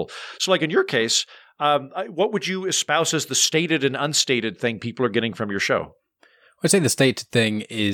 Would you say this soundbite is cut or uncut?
uncut